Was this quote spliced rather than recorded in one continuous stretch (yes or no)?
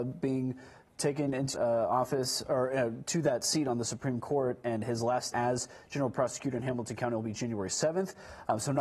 yes